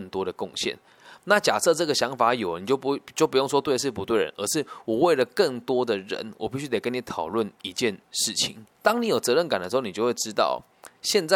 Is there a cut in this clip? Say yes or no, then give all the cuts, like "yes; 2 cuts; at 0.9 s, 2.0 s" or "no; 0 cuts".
yes; 2 cuts; at 7.5 s, 8.7 s